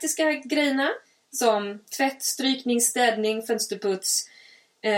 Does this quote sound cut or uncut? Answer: uncut